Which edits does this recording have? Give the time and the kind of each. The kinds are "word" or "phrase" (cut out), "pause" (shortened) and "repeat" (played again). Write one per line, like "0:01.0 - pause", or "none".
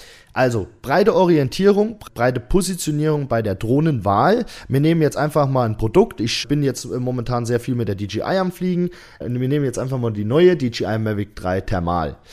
none

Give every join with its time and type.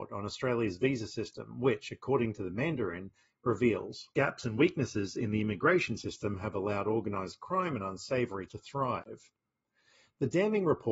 0:04.1 - pause
0:08.5 - word

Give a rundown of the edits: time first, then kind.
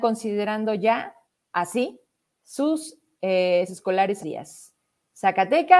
0:01.2 - pause
0:03.7 - word
0:04.2 - phrase

